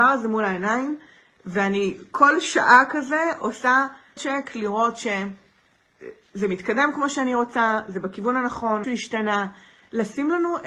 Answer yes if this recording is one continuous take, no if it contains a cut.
no